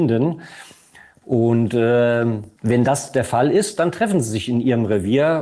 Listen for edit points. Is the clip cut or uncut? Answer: cut